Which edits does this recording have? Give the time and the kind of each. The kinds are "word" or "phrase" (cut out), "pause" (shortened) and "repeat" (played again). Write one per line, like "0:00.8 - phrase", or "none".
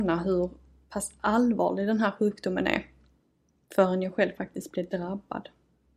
none